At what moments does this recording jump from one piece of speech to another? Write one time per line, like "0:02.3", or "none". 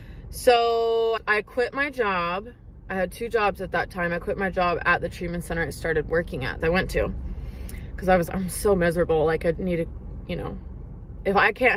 0:06.6
0:08.3
0:09.5